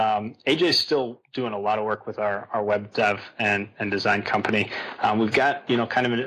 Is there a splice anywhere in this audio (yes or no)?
no